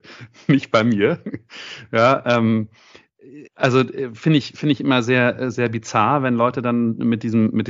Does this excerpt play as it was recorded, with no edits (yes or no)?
no